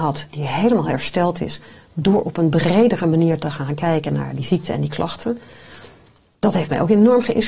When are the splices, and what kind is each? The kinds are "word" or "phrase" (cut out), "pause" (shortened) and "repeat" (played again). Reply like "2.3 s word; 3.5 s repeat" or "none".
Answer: none